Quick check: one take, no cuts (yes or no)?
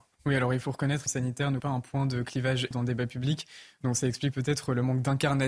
no